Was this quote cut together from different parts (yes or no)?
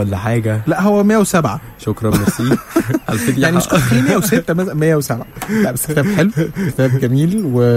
no